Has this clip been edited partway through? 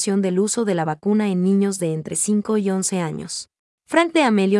yes; 1 cut; at 3.7 s

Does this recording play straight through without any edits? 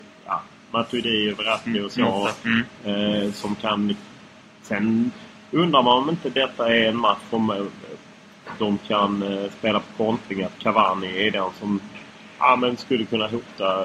yes; 0 cuts

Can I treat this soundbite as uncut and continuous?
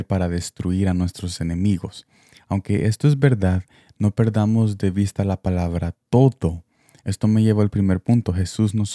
yes; 0 cuts

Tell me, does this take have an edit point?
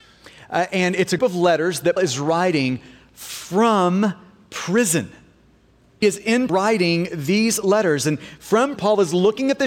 yes; 5 cuts; at 1.2 s, 2.0 s, 6.0 s, 6.5 s, 8.8 s

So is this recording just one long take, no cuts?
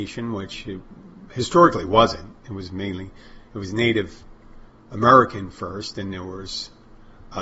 no; 1 cut; at 6.1 s

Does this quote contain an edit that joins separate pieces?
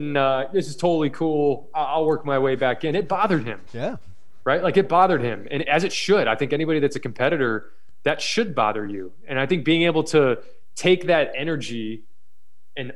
no; 0 cuts

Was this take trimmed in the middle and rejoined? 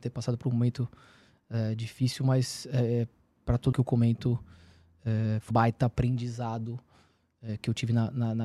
yes; 2 cuts; at 3.7 s, 5.5 s

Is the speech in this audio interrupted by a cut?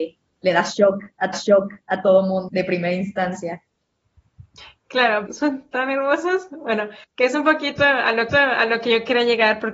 yes; 5 cuts; at 1.3 s, 2.5 s, 5.3 s, 7.0 s, 8.3 s

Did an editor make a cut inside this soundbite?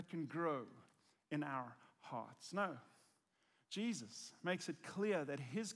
no; 0 cuts

